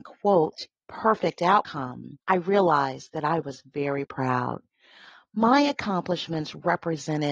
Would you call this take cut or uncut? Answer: cut